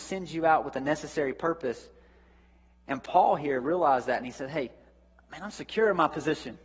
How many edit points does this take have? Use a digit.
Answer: 0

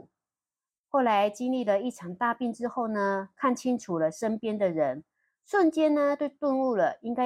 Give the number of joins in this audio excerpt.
0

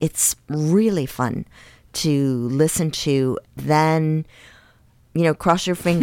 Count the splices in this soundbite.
1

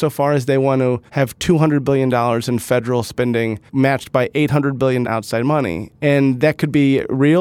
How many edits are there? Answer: 4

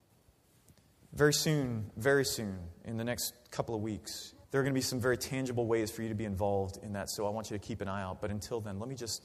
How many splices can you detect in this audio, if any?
1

